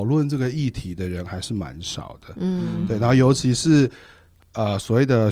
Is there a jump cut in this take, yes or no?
no